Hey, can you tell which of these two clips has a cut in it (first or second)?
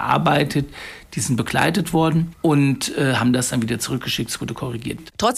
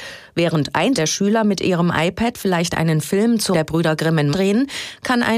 second